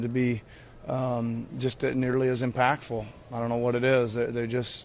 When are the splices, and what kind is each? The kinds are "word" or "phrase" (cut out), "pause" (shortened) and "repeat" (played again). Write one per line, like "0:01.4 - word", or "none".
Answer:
none

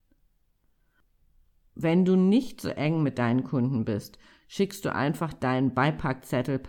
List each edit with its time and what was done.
none

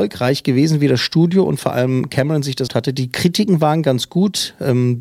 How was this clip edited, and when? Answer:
0:02.7 - word

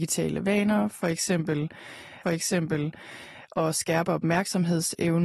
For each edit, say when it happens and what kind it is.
0:02.2 - repeat

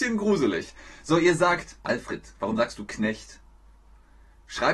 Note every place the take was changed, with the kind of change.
0:01.8 - pause

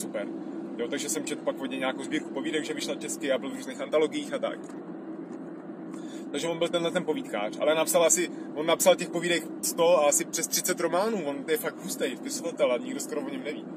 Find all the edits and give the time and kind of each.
none

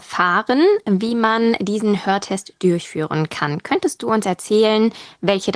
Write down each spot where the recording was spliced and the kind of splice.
none

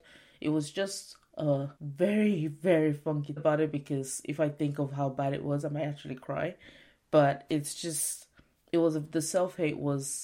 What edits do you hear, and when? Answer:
0:01.8 - pause
0:03.4 - phrase

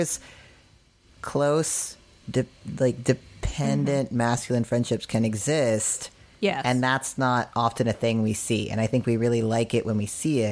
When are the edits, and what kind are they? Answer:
none

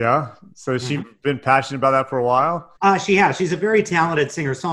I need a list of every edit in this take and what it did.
0:02.8 - pause

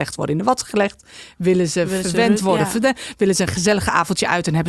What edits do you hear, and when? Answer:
none

